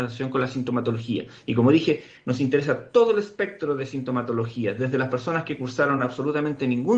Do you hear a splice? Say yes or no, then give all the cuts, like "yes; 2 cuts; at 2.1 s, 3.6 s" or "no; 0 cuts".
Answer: no; 0 cuts